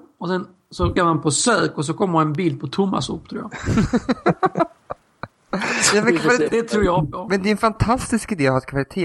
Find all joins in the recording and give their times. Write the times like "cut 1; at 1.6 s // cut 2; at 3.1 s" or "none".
cut 1; at 1.0 s // cut 2; at 6.5 s